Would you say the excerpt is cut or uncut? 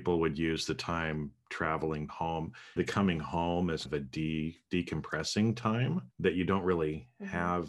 cut